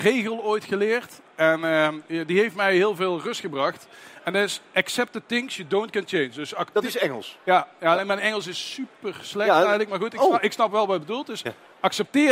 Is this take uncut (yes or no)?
yes